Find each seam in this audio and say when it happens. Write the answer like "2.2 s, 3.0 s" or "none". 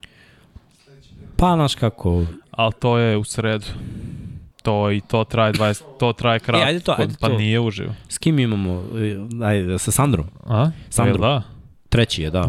4.5 s